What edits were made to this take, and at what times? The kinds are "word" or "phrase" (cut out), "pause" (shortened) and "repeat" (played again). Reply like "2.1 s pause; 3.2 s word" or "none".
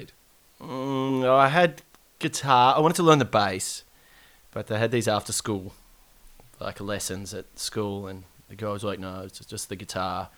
none